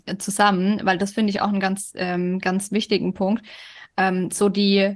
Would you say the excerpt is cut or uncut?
uncut